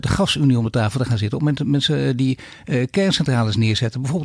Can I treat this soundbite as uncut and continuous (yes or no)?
yes